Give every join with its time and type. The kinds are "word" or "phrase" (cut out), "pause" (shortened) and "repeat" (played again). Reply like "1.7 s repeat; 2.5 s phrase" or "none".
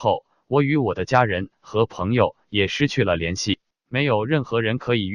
3.7 s pause